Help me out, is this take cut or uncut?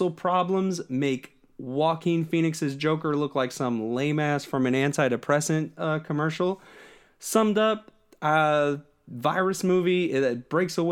uncut